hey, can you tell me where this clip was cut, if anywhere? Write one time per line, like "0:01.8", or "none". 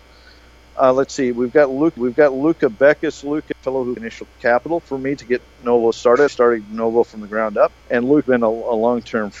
0:02.0
0:03.5
0:04.0
0:04.8
0:06.3
0:07.8
0:08.2